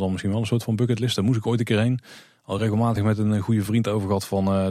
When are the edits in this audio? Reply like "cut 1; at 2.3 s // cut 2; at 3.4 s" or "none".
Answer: none